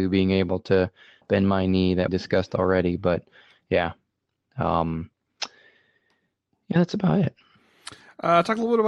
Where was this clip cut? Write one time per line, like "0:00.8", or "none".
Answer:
0:02.1